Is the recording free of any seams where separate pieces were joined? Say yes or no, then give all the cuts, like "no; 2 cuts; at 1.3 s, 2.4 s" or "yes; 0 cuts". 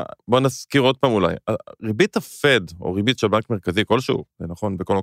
yes; 0 cuts